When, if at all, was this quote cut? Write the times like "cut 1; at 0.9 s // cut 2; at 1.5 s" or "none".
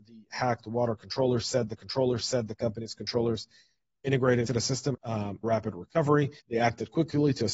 cut 1; at 1.8 s // cut 2; at 4.5 s // cut 3; at 4.9 s // cut 4; at 5.4 s // cut 5; at 6.4 s